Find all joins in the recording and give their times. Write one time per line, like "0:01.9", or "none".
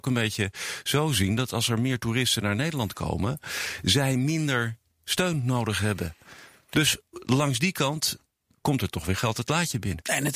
none